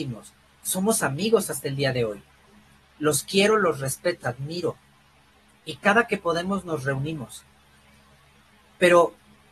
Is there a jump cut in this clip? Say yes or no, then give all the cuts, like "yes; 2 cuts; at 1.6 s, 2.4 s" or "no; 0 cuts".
yes; 1 cut; at 4.2 s